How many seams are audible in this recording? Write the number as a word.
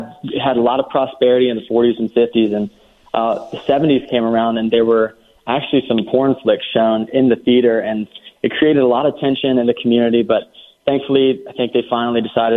zero